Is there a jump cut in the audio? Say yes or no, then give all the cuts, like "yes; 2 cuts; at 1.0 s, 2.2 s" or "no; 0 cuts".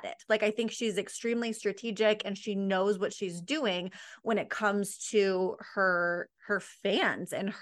no; 0 cuts